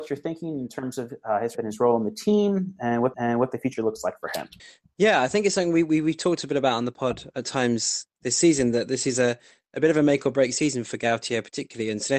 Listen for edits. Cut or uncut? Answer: cut